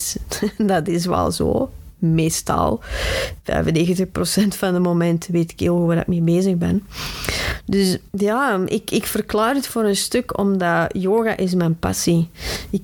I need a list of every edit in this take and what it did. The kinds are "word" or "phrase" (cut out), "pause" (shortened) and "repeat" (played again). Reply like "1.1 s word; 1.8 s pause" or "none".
8.1 s pause